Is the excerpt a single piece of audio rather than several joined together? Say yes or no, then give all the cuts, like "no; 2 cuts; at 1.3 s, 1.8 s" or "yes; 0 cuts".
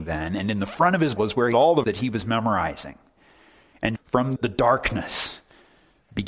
no; 5 cuts; at 1.2 s, 1.5 s, 1.8 s, 4.0 s, 4.4 s